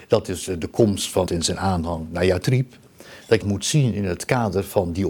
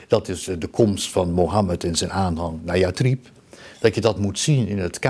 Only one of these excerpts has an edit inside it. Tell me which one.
first; 2 cuts; at 1.3 s, 3.4 s

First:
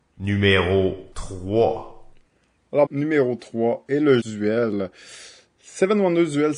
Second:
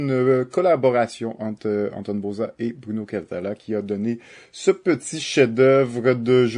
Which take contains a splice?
first; 3 cuts; at 1.1 s, 2.9 s, 4.2 s

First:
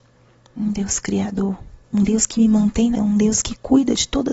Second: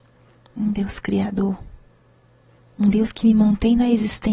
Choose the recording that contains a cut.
first; 2 cuts; at 1.8 s, 2.9 s

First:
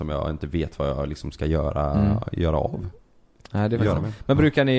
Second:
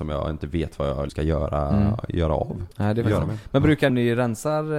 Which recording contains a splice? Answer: second; 3 cuts; at 1.1 s, 2.7 s, 3.9 s

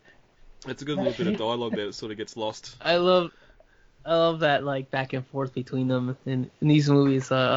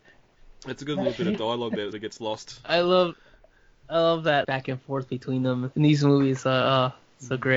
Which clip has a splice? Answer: second; 3 cuts; at 1.9 s, 4.4 s, 5.7 s

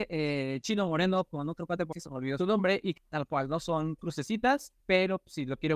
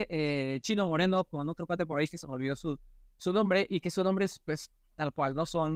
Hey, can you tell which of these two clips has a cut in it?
first; 5 cuts; at 1.9 s, 2.4 s, 3.0 s, 4.0 s, 4.8 s

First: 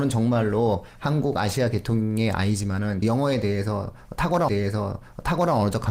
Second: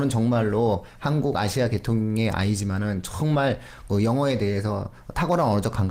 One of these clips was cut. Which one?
first; 2 cuts; at 3.0 s, 4.5 s

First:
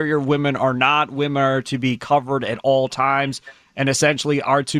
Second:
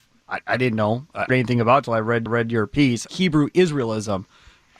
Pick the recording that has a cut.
second; 3 cuts; at 1.3 s, 2.3 s, 3.1 s

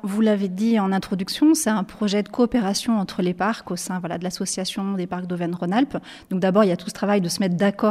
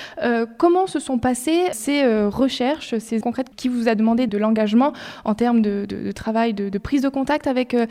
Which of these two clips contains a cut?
second; 4 cuts; at 1.7 s, 3.2 s, 3.5 s, 4.3 s

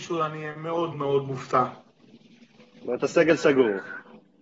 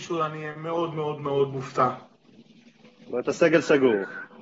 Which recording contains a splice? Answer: first; 1 cut; at 0.9 s

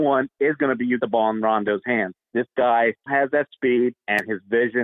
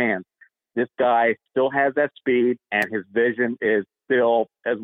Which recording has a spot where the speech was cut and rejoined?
first; 3 cuts; at 1.0 s, 2.2 s, 3.1 s

